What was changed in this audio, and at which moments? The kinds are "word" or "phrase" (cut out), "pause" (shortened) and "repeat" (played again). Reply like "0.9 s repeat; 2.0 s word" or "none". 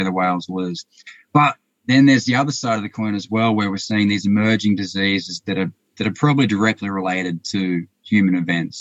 none